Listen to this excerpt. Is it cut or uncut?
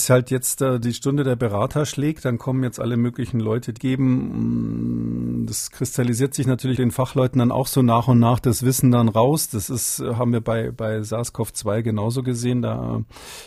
cut